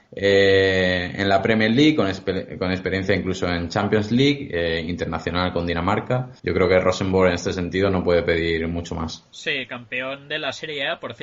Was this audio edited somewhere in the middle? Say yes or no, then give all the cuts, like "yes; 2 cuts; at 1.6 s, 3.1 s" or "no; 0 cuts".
yes; 1 cut; at 6.4 s